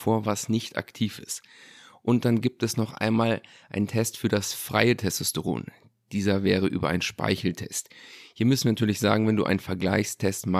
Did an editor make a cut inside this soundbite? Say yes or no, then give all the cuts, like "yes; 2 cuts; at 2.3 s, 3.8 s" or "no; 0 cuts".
no; 0 cuts